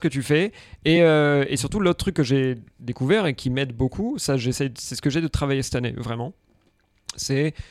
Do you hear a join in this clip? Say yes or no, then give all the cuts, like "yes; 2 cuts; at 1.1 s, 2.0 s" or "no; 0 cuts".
no; 0 cuts